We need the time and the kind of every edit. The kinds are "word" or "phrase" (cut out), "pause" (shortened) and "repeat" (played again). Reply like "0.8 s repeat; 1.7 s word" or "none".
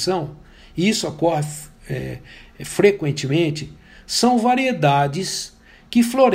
none

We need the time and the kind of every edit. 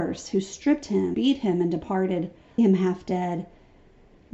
1.1 s word; 2.6 s word

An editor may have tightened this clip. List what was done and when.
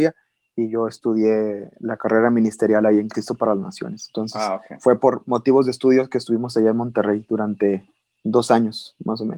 none

